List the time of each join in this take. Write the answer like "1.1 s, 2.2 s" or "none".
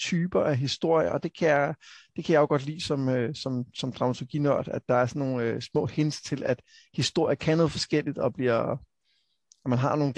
none